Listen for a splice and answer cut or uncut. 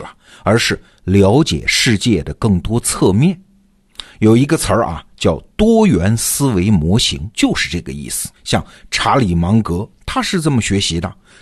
cut